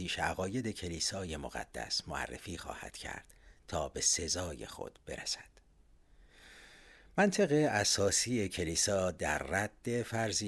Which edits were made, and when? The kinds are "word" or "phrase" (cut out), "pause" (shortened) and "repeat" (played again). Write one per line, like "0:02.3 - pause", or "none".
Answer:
none